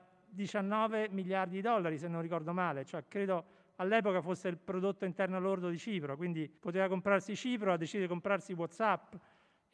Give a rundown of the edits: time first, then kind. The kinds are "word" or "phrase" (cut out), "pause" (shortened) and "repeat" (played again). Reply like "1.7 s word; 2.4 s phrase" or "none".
6.6 s pause